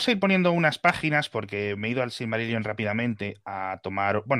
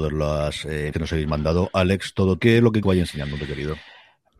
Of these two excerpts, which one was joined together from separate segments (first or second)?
second